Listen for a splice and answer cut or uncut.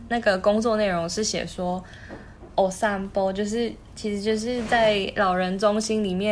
uncut